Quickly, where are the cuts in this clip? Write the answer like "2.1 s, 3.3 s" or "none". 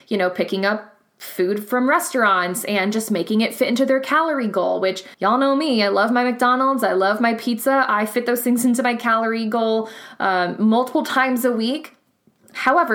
5.1 s